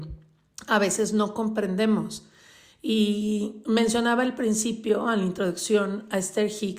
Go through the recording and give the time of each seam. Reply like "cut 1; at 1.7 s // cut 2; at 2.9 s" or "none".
none